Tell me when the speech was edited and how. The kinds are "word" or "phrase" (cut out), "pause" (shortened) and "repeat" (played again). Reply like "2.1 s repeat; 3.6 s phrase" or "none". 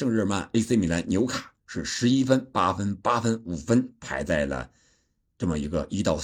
1.6 s pause